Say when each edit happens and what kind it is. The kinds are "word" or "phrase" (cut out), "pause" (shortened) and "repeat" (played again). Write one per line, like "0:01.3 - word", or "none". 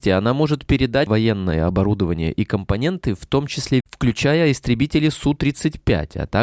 0:01.1 - word
0:03.8 - word